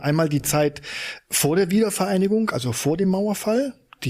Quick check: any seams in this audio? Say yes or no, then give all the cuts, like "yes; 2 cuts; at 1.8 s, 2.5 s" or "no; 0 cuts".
no; 0 cuts